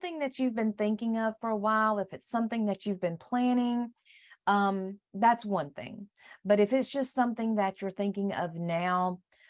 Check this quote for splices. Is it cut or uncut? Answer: uncut